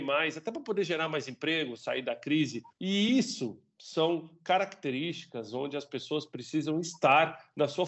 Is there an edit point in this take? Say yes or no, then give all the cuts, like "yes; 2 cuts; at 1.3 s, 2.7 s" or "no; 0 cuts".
no; 0 cuts